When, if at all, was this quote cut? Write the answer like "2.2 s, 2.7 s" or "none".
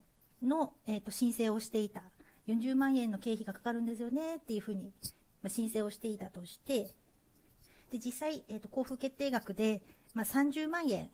none